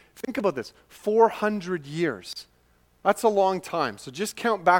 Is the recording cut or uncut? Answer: uncut